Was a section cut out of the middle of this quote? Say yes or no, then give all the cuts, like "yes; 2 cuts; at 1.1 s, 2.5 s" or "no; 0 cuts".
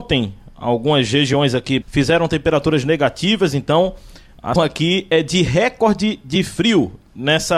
yes; 2 cuts; at 1.8 s, 4.6 s